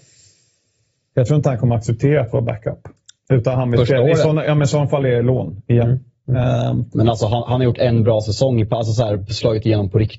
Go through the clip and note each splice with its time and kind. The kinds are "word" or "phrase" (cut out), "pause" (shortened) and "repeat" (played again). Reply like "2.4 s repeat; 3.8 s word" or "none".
none